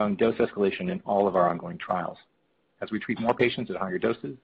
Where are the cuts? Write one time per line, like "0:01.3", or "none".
none